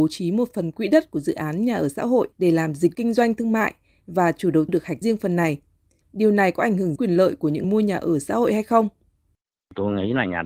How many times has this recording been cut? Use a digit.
6